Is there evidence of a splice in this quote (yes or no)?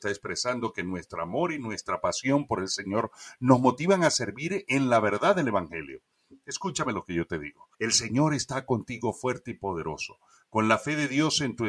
yes